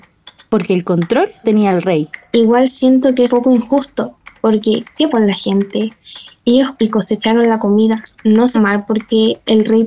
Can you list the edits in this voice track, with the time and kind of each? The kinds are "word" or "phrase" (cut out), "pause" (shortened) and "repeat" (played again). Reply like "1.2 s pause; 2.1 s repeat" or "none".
1.4 s word; 3.3 s word; 5.1 s word; 6.7 s word; 8.5 s word